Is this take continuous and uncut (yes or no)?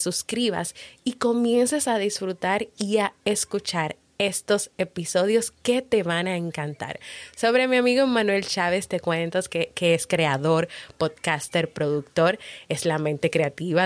yes